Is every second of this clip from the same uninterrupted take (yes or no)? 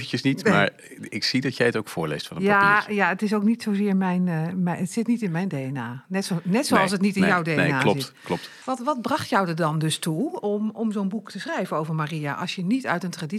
no